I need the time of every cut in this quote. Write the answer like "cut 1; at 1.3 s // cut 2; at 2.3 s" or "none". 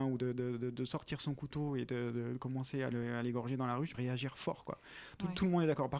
cut 1; at 3.9 s